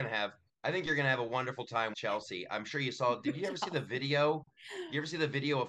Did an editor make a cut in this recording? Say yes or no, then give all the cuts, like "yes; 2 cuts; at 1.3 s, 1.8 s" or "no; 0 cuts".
yes; 1 cut; at 1.9 s